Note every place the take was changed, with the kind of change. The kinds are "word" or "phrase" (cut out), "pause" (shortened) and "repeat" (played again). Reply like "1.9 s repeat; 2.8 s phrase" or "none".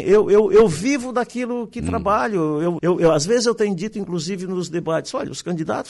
2.8 s word